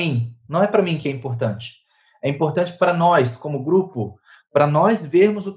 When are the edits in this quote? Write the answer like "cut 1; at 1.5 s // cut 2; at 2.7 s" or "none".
none